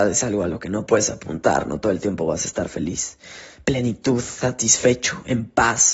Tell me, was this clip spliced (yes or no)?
no